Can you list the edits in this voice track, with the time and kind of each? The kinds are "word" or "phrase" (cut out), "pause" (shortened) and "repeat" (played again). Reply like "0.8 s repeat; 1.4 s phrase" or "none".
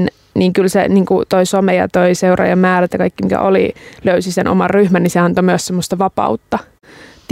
none